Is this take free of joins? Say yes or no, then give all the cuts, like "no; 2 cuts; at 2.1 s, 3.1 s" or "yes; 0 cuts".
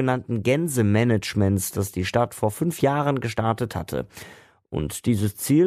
yes; 0 cuts